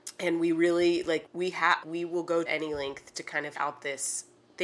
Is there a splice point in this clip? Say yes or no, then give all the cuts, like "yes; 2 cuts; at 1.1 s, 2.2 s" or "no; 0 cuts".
yes; 5 cuts; at 1.3 s, 1.8 s, 2.5 s, 3.1 s, 3.5 s